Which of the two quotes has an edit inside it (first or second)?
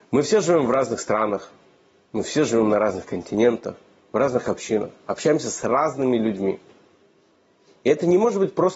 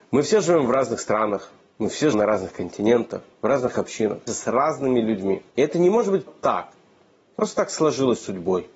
second